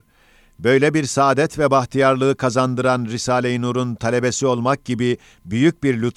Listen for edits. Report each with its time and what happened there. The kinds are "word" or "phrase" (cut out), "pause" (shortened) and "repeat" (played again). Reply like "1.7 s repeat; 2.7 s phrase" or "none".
none